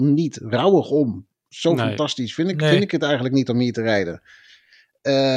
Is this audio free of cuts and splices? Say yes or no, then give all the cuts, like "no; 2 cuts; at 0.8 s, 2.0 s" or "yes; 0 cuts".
yes; 0 cuts